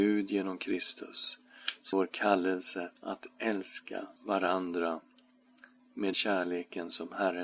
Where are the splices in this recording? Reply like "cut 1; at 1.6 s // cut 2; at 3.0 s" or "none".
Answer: cut 1; at 1.9 s // cut 2; at 3.0 s // cut 3; at 4.2 s // cut 4; at 6.1 s